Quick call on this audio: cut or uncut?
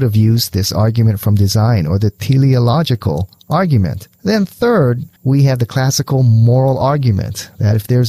uncut